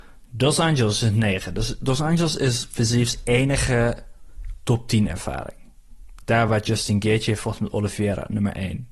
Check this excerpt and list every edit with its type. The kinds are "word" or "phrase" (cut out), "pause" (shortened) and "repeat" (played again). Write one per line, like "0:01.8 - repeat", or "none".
none